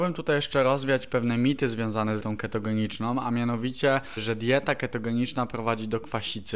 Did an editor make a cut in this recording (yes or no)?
yes